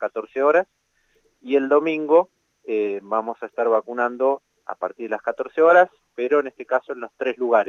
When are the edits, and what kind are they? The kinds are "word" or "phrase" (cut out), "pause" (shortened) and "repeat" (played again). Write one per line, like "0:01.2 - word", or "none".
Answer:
none